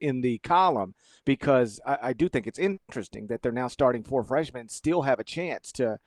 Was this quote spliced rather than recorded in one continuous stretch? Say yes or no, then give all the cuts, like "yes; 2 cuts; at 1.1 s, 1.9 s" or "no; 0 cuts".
no; 0 cuts